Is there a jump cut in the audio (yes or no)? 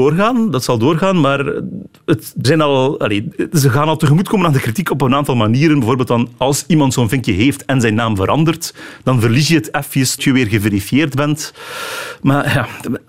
yes